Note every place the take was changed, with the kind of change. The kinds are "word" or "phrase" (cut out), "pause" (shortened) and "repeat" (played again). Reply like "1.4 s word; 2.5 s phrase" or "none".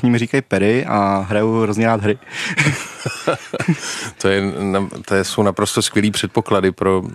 none